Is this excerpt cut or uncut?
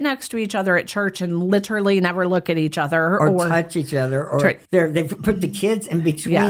cut